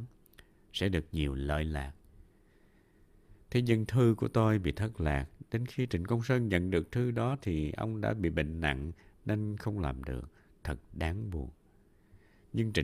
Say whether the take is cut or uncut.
uncut